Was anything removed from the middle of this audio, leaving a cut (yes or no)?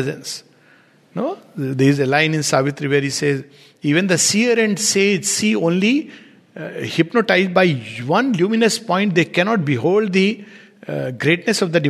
no